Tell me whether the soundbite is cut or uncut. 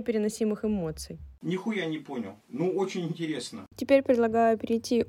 cut